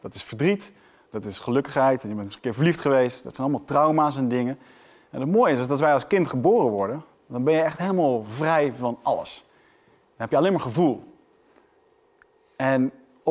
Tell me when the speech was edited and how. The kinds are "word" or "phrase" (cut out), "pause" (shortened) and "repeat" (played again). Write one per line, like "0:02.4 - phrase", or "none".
none